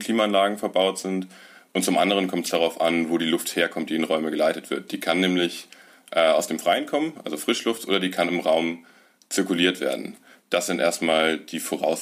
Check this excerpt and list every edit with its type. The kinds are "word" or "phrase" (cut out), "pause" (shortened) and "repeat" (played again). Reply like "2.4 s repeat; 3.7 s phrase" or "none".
none